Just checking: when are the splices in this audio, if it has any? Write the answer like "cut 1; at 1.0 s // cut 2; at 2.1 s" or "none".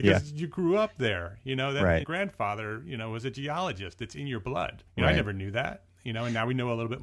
cut 1; at 2.0 s // cut 2; at 4.9 s